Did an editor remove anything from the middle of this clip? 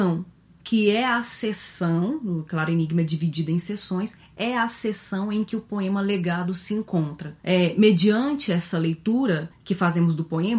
no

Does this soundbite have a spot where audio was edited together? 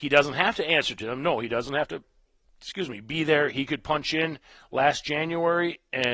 no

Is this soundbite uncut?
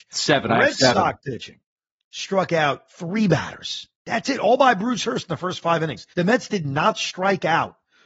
no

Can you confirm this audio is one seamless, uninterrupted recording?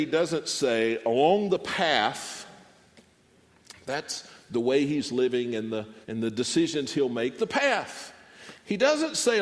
no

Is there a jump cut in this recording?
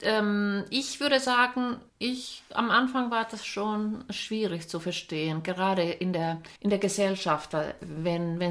yes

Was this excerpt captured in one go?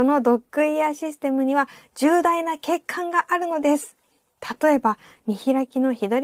yes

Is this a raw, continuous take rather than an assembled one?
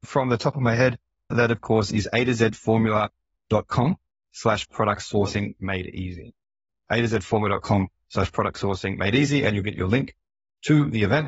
yes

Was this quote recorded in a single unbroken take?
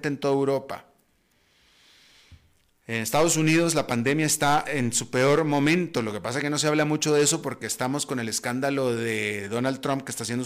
yes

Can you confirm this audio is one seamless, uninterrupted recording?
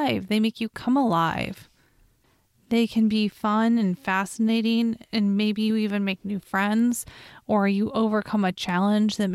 yes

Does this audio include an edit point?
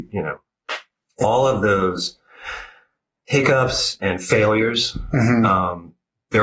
yes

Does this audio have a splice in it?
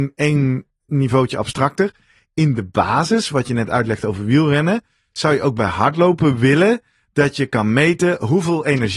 no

